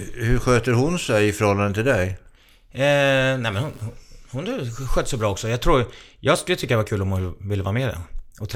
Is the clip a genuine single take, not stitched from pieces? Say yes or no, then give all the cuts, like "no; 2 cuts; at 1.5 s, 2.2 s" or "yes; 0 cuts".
yes; 0 cuts